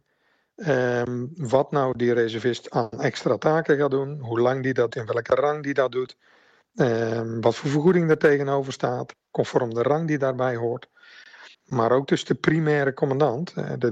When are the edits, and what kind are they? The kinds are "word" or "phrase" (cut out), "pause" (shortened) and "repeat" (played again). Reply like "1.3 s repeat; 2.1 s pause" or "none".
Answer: 4.9 s word; 11.5 s pause

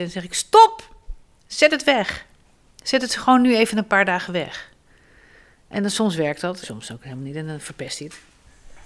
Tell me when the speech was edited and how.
6.6 s word

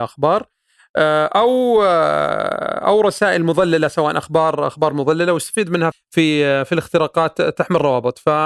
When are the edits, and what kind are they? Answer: 5.9 s word

